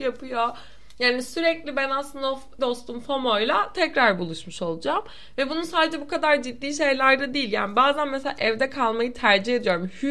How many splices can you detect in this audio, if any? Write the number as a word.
one